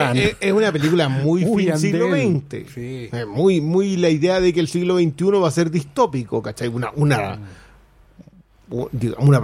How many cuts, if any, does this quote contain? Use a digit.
0